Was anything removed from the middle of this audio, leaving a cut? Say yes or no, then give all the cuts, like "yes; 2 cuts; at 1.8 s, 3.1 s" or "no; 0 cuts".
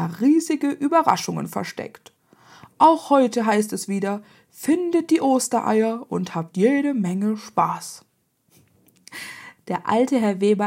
no; 0 cuts